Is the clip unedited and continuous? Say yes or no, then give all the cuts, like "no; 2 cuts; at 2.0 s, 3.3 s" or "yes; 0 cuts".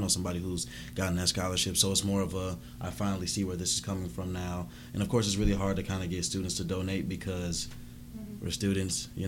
yes; 0 cuts